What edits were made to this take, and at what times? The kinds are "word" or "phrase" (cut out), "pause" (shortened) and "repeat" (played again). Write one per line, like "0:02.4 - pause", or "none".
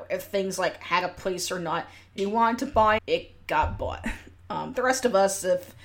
0:02.2 - word
0:03.0 - word
0:04.7 - word

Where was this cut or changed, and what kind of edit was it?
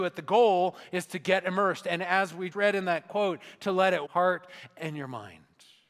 0:02.5 - word
0:04.1 - phrase

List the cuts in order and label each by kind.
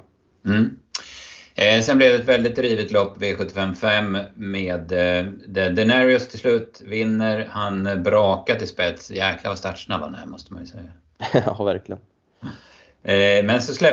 none

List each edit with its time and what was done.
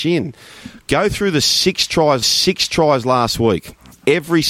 0:02.2 - repeat

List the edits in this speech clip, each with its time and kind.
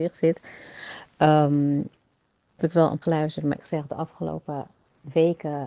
0:02.6 - word
0:03.0 - word
0:03.6 - word

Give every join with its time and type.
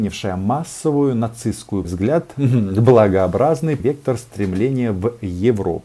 0:01.8 - phrase
0:03.8 - word

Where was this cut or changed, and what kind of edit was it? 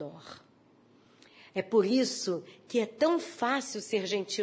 none

